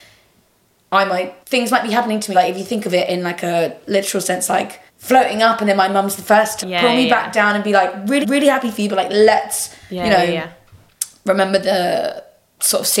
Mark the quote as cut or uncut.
cut